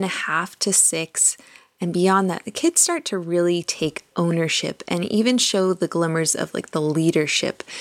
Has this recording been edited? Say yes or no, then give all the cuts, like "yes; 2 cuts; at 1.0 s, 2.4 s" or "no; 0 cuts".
no; 0 cuts